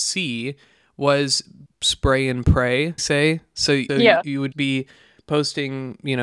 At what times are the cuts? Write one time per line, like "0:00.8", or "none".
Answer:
0:01.7
0:03.0
0:03.9
0:04.5